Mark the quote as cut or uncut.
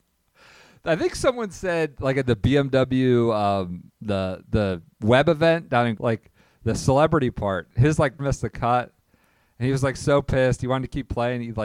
cut